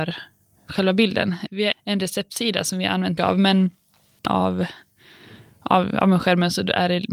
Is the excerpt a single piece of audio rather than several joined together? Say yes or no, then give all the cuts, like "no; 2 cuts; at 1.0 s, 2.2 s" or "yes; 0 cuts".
no; 3 cuts; at 1.7 s, 3.2 s, 4.3 s